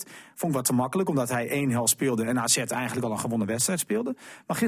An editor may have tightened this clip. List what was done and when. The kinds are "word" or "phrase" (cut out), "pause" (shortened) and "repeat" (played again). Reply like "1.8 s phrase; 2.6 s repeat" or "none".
none